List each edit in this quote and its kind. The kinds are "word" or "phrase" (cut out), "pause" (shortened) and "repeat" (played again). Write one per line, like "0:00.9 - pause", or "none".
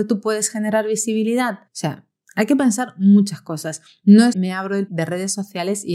0:01.7 - pause
0:04.3 - word
0:04.9 - word